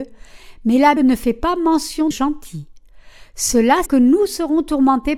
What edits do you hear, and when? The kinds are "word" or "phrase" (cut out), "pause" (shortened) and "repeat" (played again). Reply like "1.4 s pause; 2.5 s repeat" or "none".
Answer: 1.0 s word; 2.1 s word; 3.9 s word